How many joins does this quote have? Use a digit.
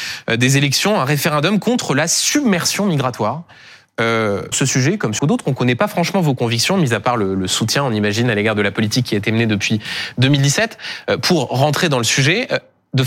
2